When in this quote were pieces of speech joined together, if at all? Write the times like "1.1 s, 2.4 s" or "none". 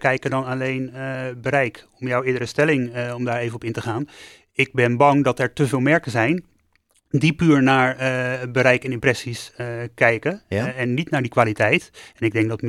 none